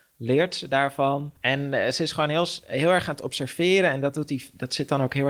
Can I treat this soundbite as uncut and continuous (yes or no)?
no